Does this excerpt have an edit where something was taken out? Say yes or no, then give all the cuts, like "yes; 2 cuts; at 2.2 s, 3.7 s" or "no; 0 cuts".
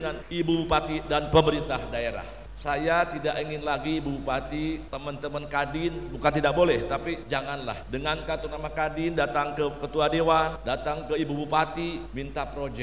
no; 0 cuts